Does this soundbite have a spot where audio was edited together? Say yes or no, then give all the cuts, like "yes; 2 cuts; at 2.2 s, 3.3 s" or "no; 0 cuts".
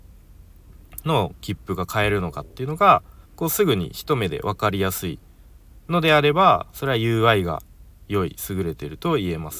yes; 1 cut; at 3.2 s